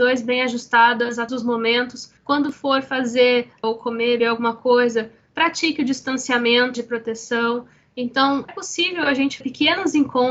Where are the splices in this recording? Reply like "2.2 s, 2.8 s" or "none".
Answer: 1.3 s, 2.2 s, 3.6 s, 4.2 s, 6.7 s, 8.5 s, 9.4 s